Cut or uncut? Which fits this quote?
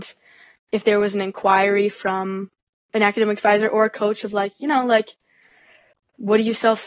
uncut